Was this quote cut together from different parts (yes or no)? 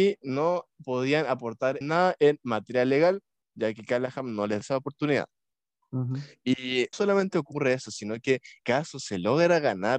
yes